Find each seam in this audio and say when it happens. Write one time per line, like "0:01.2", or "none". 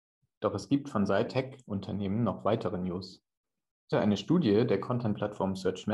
0:01.3
0:03.9